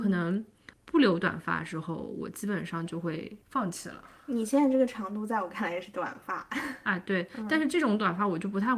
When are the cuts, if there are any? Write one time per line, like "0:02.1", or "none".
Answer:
0:03.4